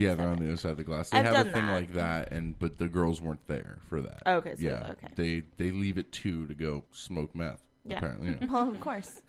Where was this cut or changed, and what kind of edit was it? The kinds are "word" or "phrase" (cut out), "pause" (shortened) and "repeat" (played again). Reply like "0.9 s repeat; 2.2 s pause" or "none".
6.9 s pause